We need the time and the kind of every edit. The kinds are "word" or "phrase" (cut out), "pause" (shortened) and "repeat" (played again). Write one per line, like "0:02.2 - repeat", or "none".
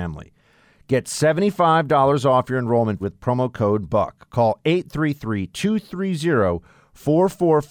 0:03.0 - word